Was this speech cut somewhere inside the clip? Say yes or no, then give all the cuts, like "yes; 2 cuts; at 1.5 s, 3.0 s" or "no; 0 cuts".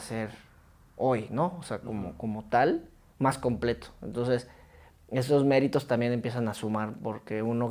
no; 0 cuts